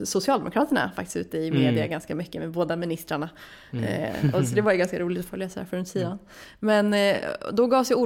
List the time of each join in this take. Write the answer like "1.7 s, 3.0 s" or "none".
none